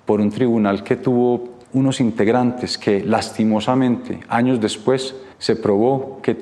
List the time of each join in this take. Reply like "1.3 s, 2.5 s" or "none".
1.6 s, 5.3 s